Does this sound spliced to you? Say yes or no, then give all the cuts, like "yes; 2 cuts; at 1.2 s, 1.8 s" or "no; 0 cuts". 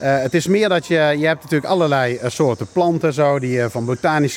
no; 0 cuts